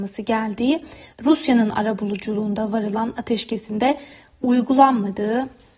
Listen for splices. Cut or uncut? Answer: uncut